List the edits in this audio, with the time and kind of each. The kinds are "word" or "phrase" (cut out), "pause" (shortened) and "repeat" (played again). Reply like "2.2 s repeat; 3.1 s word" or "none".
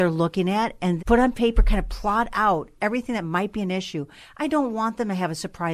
1.0 s word; 2.8 s word